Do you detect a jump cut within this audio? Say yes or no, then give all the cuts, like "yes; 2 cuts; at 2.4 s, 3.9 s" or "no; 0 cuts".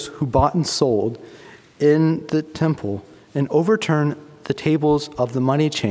no; 0 cuts